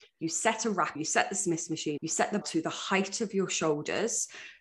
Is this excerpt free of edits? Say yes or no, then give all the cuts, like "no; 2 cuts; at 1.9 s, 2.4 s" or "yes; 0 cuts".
no; 3 cuts; at 1.0 s, 2.0 s, 2.4 s